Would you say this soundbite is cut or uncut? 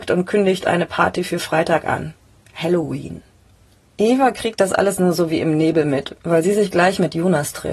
uncut